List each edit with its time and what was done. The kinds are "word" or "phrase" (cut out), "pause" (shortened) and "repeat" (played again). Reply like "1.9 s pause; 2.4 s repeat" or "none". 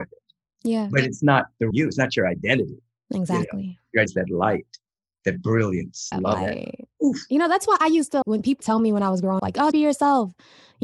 1.7 s word; 4.1 s word; 6.1 s word; 8.2 s word; 8.6 s word; 9.4 s word; 9.7 s word